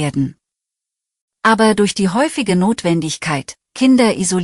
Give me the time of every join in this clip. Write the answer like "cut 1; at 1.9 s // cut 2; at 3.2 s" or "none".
none